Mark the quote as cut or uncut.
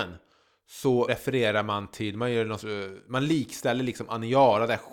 cut